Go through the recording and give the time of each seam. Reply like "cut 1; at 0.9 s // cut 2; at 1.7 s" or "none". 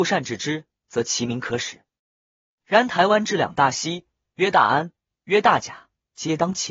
none